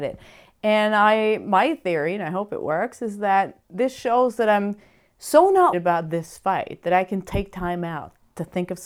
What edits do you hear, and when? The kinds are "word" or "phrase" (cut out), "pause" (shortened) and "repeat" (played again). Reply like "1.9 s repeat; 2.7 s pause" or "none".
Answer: 5.7 s word